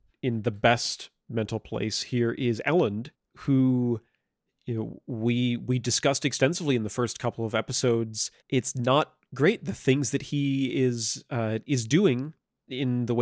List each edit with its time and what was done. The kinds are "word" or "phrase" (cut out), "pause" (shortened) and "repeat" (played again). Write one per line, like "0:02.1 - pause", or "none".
0:03.1 - pause
0:08.4 - pause